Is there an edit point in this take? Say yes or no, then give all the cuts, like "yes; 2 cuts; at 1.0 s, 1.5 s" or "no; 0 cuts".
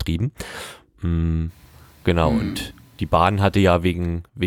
no; 0 cuts